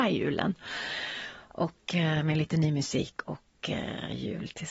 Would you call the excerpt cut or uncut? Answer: uncut